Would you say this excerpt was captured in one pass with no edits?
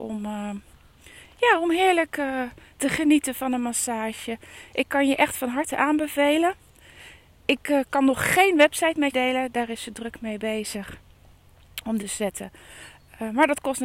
no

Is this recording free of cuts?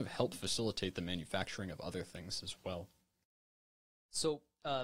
yes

